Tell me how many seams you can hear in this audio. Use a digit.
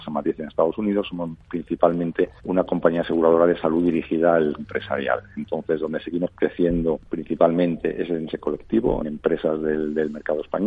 4